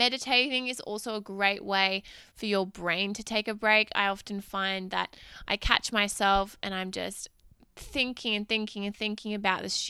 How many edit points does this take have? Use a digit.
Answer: 0